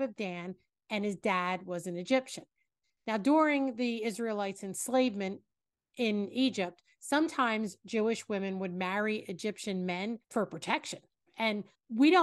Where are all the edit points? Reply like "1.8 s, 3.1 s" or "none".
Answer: 10.2 s